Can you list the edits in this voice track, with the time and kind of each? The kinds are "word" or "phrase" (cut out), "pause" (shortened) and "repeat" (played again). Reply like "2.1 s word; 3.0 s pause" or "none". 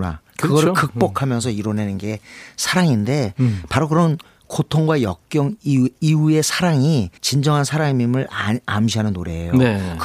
7.2 s pause